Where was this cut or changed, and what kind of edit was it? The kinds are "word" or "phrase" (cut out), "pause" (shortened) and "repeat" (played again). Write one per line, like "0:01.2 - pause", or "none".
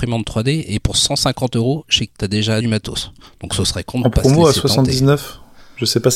0:02.1 - word
0:02.6 - phrase